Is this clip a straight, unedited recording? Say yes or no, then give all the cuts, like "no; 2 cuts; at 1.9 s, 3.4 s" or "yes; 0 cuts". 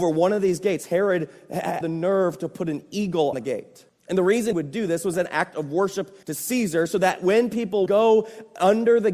no; 7 cuts; at 1.8 s, 3.3 s, 3.9 s, 4.5 s, 5.1 s, 6.2 s, 7.9 s